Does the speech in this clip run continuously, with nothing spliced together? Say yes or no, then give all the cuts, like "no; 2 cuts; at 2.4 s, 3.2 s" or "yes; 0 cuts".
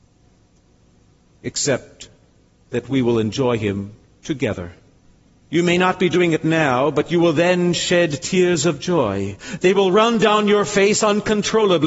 no; 1 cut; at 5.0 s